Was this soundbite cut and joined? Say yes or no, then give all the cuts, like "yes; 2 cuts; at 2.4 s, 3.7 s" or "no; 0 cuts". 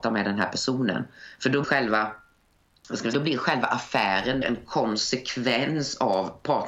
yes; 3 cuts; at 1.6 s, 3.1 s, 4.4 s